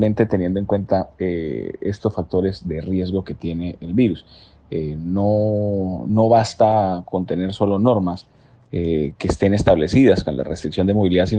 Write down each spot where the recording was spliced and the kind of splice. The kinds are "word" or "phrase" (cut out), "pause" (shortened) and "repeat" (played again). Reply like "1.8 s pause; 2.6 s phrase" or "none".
none